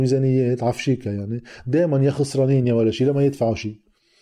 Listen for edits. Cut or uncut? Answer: uncut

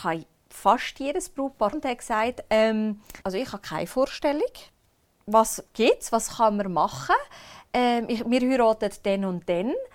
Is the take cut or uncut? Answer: cut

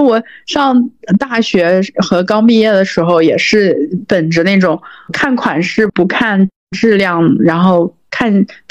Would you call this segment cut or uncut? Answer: uncut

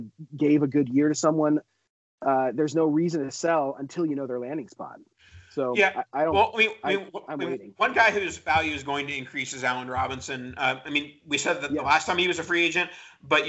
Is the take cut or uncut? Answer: uncut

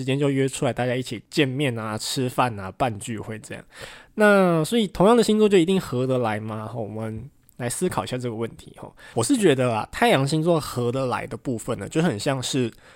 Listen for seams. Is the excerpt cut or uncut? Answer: uncut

